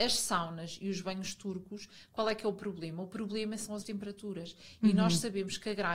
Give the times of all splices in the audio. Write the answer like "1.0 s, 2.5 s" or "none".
3.8 s